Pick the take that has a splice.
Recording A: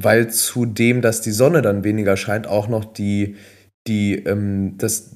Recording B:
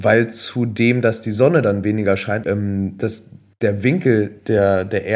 B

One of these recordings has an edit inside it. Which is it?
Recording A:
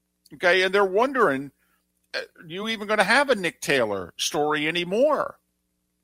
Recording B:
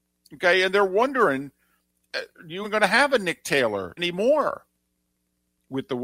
B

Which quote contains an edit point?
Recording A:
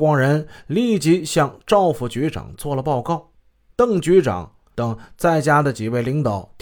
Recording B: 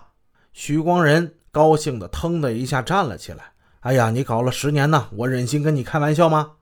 B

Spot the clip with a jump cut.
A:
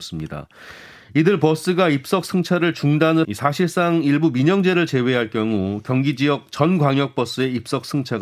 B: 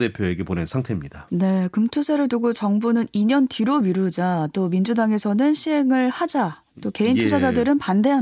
A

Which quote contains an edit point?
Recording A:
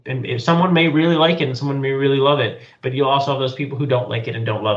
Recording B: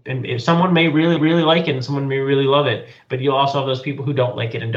B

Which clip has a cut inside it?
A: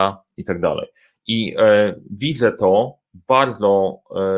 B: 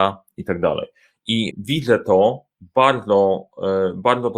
B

